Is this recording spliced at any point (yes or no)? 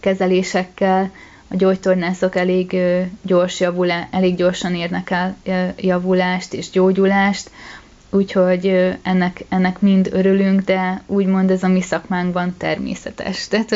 no